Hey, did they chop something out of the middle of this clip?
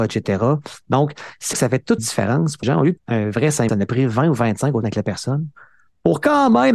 yes; 6 cuts; at 1.5 s, 2.0 s, 2.6 s, 3.0 s, 3.7 s, 4.8 s

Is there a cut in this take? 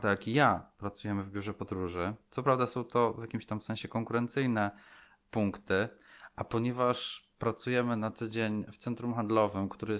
no; 0 cuts

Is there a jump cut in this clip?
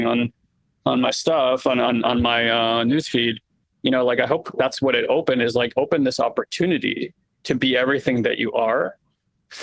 no; 0 cuts

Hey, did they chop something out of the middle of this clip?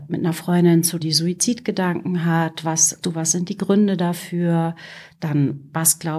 yes; 2 cuts; at 1.0 s, 3.0 s

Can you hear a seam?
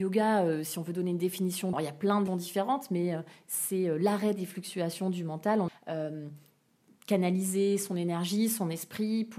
yes; 3 cuts; at 1.7 s, 2.3 s, 5.7 s

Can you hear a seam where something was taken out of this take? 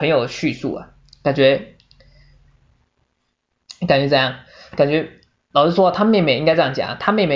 no; 0 cuts

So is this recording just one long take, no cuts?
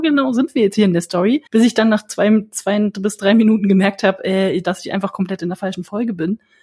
no; 1 cut; at 1.5 s

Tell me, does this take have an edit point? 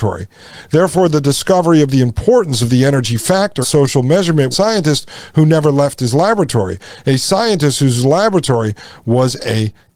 yes; 2 cuts; at 3.6 s, 4.5 s

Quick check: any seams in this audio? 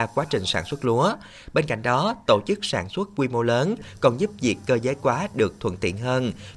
no; 0 cuts

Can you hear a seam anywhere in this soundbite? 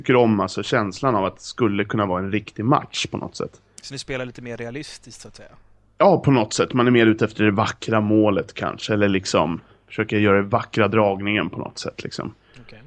no; 0 cuts

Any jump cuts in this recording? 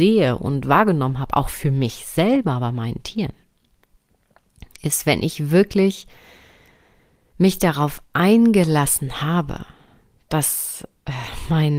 no; 0 cuts

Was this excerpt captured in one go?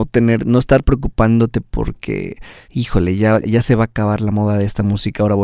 no; 1 cut; at 3.4 s

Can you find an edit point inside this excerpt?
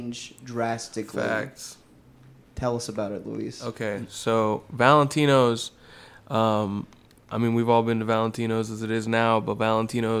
no; 0 cuts

